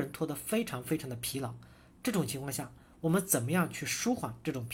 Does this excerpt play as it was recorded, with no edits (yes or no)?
yes